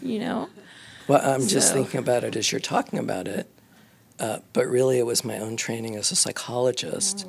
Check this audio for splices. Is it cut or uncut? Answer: uncut